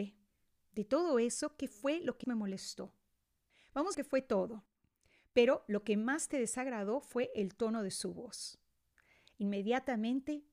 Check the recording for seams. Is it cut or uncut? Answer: cut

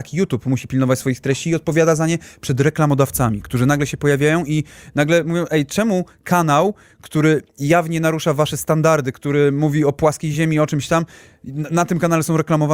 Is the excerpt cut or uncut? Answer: uncut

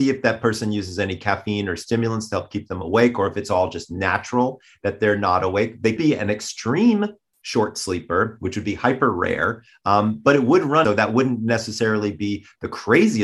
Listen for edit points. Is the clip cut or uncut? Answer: cut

